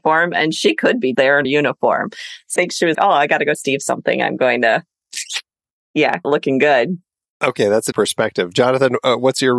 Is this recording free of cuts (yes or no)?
no